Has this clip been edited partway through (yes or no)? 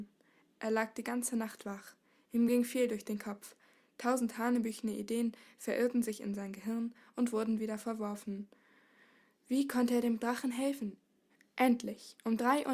no